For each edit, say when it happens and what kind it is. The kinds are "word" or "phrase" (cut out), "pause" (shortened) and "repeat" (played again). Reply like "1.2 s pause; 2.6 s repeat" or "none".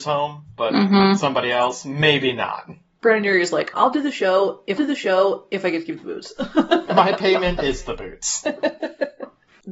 3.7 s word; 4.8 s repeat